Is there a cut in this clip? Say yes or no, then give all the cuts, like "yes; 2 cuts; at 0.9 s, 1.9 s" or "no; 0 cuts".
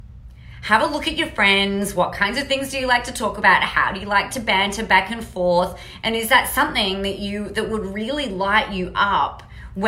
no; 0 cuts